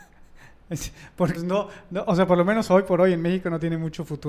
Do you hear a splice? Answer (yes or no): yes